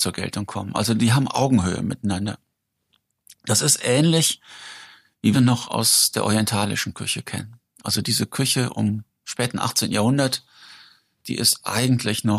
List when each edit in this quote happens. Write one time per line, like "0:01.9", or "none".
0:05.3